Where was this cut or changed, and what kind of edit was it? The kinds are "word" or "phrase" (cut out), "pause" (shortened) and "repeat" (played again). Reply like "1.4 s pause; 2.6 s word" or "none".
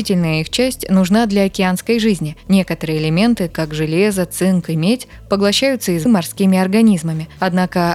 3.5 s word; 6.1 s word